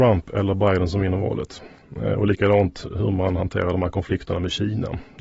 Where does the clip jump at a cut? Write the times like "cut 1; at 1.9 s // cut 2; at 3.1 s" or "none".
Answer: none